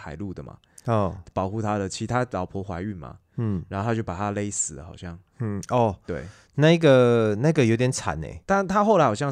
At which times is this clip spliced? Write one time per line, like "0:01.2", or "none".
0:05.3